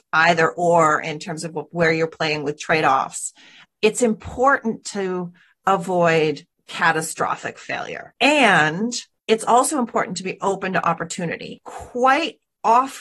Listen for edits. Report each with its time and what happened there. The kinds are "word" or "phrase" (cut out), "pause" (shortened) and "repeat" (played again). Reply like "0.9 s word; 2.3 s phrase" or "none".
none